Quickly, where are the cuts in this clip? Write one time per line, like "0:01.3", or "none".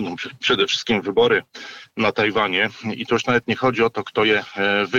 none